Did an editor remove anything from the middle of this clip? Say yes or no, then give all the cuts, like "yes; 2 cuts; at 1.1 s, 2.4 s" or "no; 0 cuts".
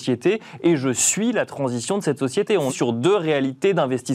yes; 1 cut; at 2.7 s